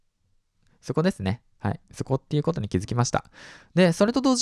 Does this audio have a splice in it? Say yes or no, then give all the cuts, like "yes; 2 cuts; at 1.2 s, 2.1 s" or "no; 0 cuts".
no; 0 cuts